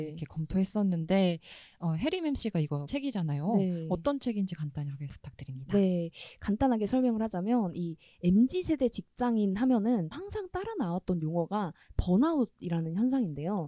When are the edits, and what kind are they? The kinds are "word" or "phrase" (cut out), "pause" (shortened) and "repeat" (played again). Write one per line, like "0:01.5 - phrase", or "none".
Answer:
0:02.9 - word
0:05.1 - word
0:10.1 - word